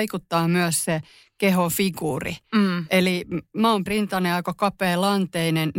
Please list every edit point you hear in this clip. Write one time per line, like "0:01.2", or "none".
0:03.9